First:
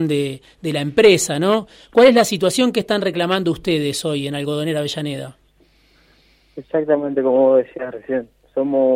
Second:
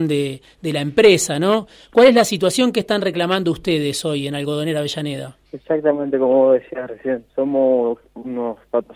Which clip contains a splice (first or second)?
second